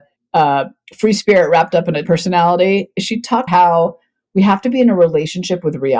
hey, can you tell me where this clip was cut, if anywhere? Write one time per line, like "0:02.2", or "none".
0:02.0
0:03.5